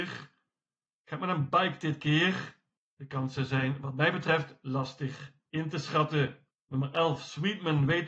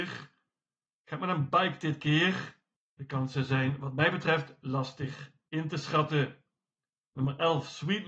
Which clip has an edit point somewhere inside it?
first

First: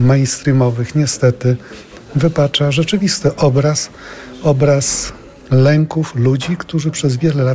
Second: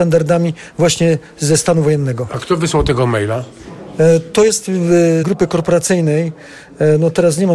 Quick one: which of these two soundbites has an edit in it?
second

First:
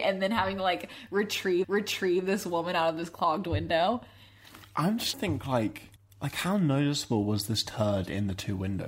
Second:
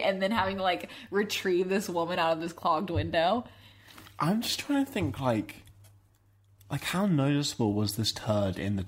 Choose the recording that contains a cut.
first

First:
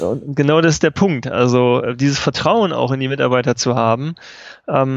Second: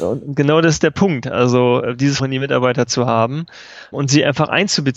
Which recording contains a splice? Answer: second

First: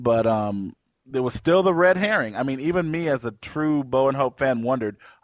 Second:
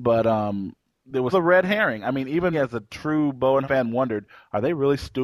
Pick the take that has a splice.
second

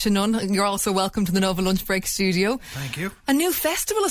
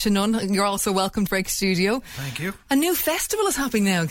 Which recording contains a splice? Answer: second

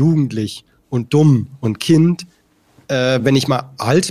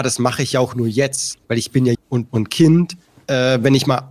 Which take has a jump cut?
second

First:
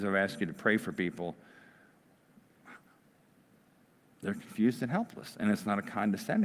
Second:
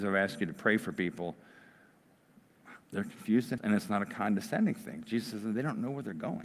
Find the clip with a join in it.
second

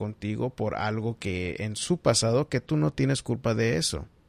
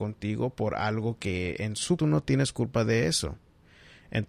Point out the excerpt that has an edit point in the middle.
second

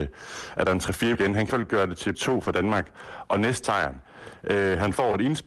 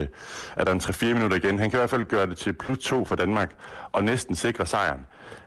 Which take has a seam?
first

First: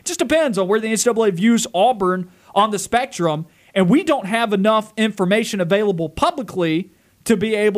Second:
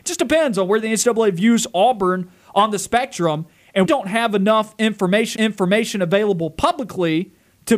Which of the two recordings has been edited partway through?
second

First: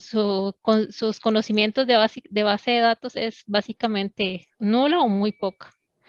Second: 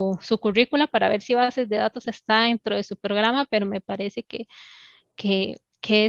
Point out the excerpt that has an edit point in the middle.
first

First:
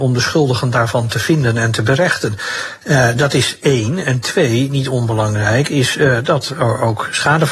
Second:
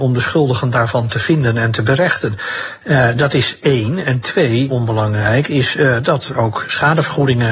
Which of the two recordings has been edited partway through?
second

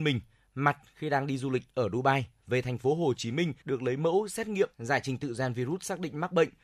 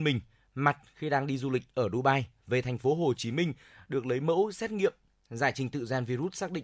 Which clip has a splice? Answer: first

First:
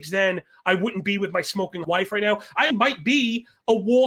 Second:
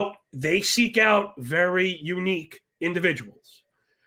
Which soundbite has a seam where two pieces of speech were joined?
first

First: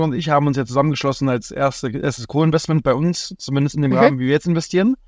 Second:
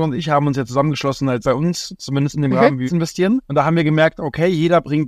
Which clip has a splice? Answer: second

